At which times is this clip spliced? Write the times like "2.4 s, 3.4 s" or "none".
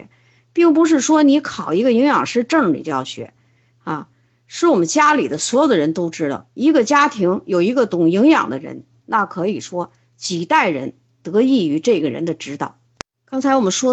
none